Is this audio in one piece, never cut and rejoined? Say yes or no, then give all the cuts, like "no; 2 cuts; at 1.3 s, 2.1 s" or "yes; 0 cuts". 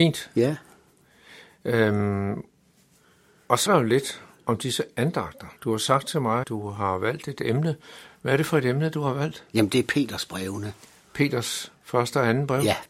no; 3 cuts; at 3.7 s, 5.6 s, 6.4 s